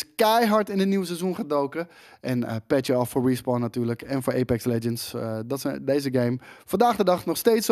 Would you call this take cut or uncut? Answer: uncut